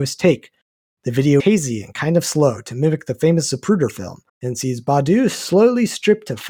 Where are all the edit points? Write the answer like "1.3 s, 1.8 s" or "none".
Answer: 1.4 s, 4.3 s